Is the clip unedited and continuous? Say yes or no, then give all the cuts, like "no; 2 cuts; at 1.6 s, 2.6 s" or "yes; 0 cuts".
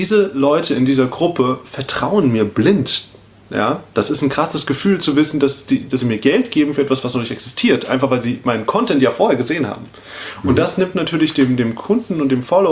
yes; 0 cuts